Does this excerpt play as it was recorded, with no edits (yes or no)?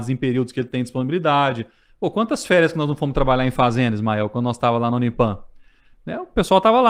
yes